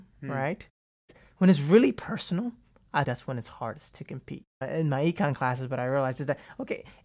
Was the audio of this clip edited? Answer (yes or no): yes